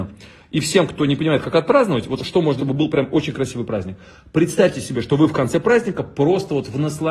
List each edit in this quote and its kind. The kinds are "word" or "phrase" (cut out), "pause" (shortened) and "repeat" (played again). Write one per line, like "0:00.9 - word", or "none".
0:02.2 - word
0:02.6 - word